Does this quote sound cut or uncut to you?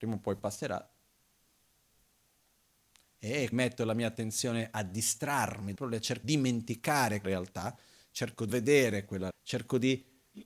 cut